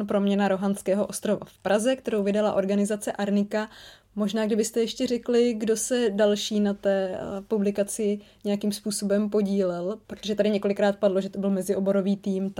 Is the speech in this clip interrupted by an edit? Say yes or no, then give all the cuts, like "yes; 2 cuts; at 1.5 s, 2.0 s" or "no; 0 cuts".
yes; 1 cut; at 10.0 s